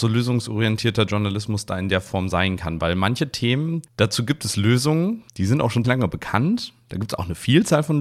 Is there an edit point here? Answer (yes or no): yes